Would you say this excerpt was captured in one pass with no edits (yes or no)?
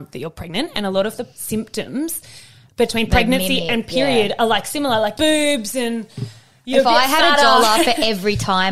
no